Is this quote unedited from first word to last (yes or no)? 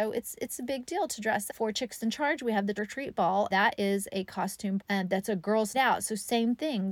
no